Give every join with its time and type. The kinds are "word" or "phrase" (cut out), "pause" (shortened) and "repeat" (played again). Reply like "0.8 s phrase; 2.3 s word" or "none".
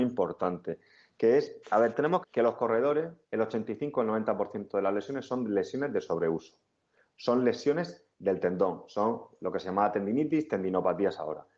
1.6 s pause; 2.2 s phrase; 3.2 s pause; 8.1 s pause